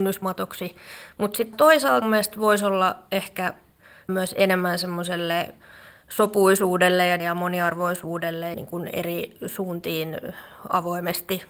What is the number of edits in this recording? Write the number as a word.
five